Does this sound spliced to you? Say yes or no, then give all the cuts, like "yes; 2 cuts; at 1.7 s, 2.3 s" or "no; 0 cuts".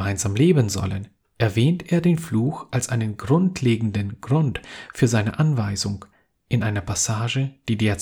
no; 0 cuts